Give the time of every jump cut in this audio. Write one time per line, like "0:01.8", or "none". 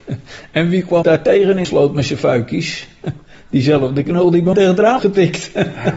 0:01.0
0:01.6
0:04.5
0:05.0

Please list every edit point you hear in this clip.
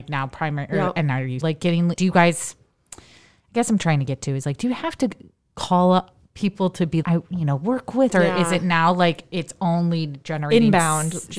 0:01.4
0:02.0
0:07.0
0:08.1

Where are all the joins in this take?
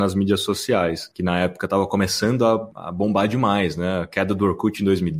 none

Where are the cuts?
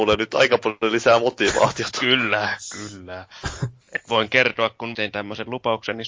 0:04.9

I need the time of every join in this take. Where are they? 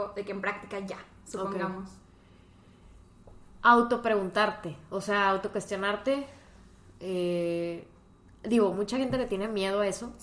none

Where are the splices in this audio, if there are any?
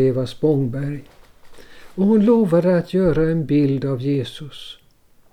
none

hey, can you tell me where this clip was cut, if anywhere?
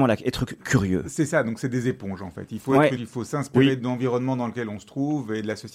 0:03.0

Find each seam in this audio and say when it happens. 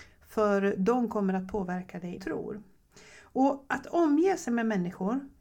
0:02.2

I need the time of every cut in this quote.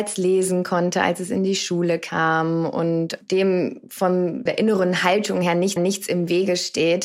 0:04.5
0:05.8

